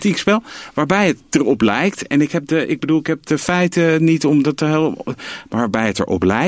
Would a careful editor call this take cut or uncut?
uncut